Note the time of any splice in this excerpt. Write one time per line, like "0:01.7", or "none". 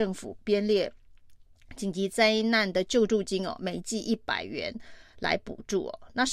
none